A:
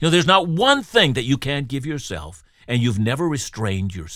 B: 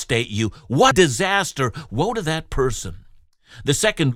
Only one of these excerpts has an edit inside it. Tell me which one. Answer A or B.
B